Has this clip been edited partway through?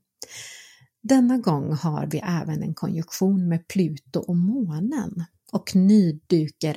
no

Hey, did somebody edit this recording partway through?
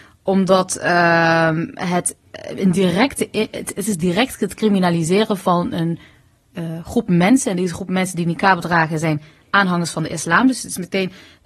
no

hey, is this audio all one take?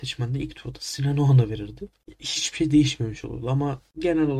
yes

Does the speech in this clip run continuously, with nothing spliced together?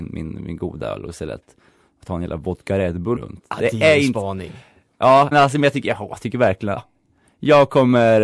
no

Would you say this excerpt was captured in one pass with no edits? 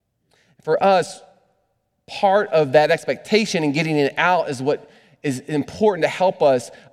yes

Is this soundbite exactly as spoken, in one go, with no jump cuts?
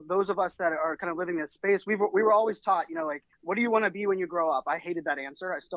no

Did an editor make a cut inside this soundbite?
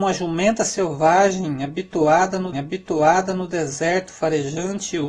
yes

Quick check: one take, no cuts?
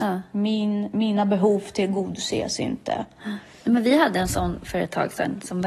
yes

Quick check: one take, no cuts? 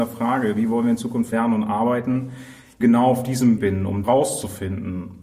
no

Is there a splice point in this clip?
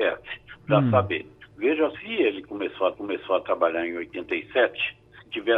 yes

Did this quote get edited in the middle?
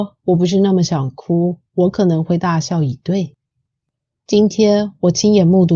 yes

